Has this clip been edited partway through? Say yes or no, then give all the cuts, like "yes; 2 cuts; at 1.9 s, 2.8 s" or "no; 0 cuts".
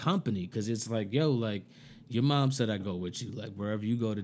yes; 1 cut; at 2.8 s